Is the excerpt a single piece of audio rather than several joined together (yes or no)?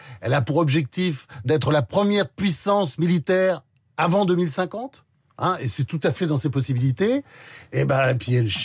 yes